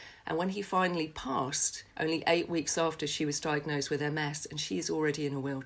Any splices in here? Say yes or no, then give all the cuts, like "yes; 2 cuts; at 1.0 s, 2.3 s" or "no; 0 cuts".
yes; 1 cut; at 1.9 s